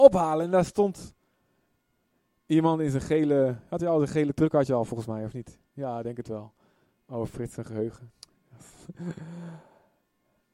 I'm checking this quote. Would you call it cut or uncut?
uncut